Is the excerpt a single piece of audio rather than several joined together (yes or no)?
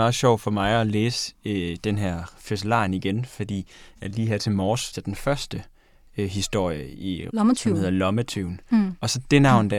no